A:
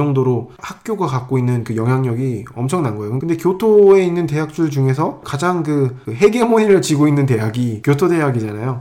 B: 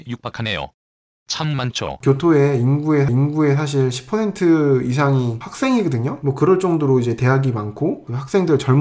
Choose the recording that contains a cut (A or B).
B